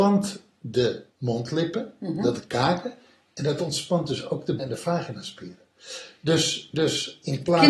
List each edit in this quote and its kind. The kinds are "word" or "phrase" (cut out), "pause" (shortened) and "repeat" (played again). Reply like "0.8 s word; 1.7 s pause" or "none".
1.1 s pause; 2.4 s word; 4.6 s word